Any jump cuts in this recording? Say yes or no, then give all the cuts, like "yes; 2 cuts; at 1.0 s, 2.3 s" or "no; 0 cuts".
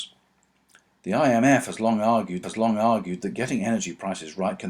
yes; 1 cut; at 2.4 s